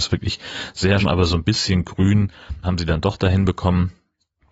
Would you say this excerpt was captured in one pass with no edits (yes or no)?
no